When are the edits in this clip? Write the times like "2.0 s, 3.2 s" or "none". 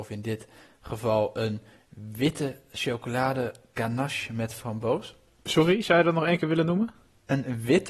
none